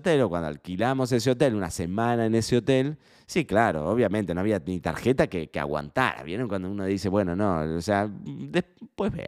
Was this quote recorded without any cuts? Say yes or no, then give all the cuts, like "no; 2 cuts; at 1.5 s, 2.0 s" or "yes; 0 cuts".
yes; 0 cuts